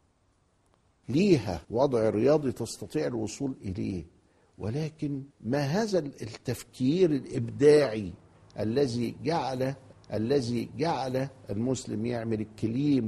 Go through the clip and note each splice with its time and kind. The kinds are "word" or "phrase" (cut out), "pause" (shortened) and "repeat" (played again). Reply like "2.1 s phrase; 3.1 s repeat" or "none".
1.6 s pause; 5.3 s pause; 9.9 s repeat

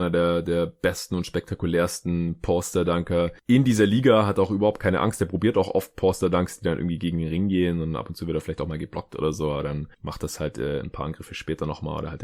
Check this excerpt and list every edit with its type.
none

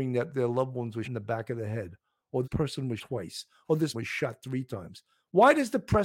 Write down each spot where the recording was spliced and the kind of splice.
1.0 s word; 2.4 s word; 3.0 s word; 3.9 s word

